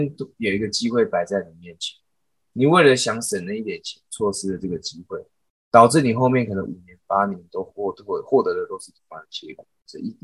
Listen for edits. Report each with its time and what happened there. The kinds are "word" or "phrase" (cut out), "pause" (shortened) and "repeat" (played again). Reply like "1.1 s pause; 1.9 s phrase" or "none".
none